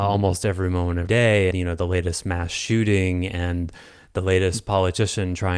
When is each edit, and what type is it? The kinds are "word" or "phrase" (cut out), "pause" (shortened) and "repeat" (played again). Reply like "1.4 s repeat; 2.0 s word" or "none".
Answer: 1.1 s word; 1.5 s word